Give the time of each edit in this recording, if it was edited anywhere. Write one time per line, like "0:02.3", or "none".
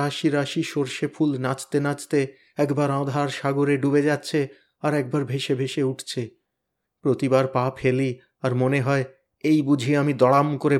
none